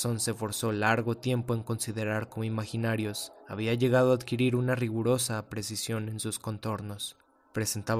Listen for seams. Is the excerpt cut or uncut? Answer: cut